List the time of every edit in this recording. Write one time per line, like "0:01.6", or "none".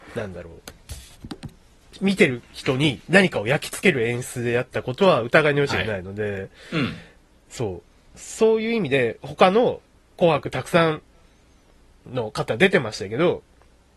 0:09.9